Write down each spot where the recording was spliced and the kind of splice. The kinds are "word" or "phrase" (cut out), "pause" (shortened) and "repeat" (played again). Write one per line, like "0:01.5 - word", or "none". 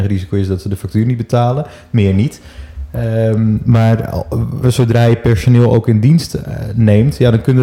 0:04.6 - word